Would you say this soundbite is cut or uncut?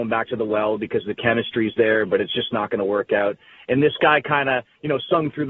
uncut